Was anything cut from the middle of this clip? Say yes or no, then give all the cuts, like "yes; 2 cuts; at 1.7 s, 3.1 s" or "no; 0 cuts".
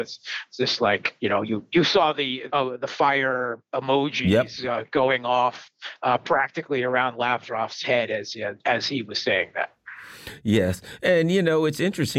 yes; 1 cut; at 2.5 s